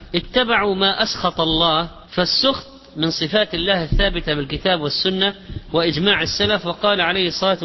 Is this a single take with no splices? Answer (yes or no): no